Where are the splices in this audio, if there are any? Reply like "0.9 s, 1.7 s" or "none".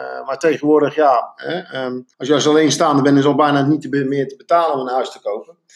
2.1 s